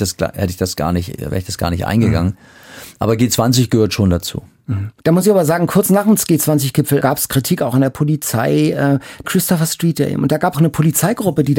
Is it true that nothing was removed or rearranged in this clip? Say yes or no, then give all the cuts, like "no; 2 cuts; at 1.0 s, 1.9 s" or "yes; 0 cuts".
no; 4 cuts; at 5.0 s, 7.0 s, 9.2 s, 10.5 s